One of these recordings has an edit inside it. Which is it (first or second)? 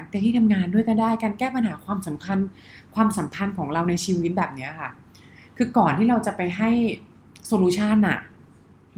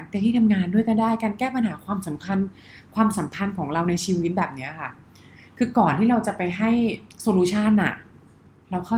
second